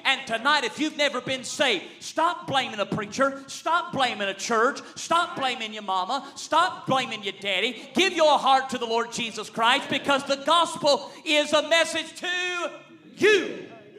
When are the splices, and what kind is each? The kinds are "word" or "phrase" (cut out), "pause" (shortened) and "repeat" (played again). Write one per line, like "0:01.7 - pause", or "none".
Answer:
none